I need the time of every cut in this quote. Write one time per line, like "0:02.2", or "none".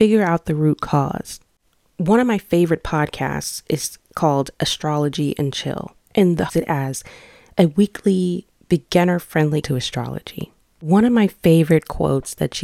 0:06.0
0:06.5
0:09.6